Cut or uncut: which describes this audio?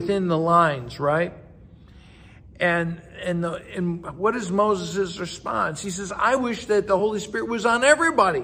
uncut